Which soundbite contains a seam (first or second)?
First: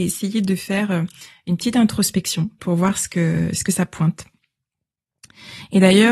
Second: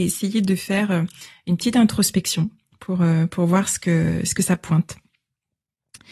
first